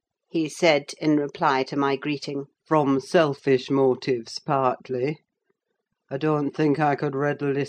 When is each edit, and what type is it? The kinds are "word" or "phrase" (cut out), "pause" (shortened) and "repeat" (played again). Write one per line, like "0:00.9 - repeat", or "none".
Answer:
0:02.5 - pause